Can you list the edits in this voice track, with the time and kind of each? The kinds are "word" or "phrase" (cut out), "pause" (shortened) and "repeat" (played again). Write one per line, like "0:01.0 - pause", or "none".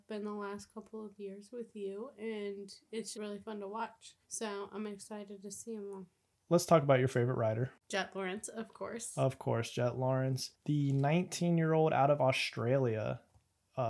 0:03.1 - word
0:04.2 - pause
0:06.3 - word
0:07.8 - pause
0:10.6 - pause